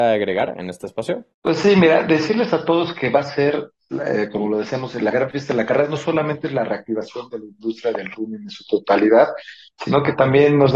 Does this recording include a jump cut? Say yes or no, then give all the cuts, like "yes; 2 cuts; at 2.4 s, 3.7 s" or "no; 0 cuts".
yes; 1 cut; at 1.3 s